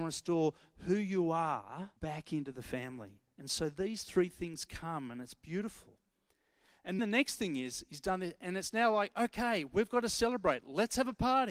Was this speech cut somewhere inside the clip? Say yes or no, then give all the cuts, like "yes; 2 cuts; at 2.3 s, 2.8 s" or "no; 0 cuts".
yes; 2 cuts; at 2.0 s, 7.0 s